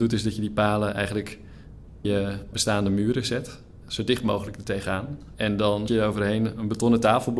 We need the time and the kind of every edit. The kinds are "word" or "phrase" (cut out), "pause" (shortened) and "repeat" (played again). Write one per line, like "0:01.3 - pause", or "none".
0:02.0 - word
0:02.5 - word
0:05.9 - word